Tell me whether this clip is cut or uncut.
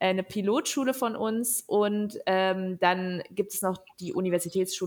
uncut